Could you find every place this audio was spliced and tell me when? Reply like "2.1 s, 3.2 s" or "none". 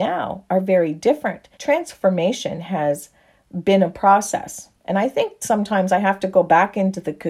1.5 s